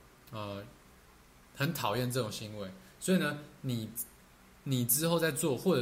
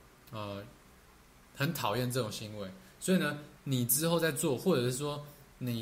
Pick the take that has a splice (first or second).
second